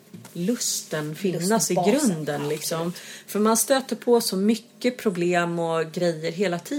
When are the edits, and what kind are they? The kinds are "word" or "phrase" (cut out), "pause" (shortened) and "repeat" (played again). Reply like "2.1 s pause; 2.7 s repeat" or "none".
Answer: none